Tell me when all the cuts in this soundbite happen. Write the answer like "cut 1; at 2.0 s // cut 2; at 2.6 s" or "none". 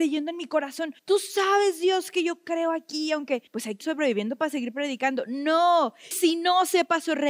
cut 1; at 1.0 s // cut 2; at 3.5 s // cut 3; at 3.8 s // cut 4; at 6.1 s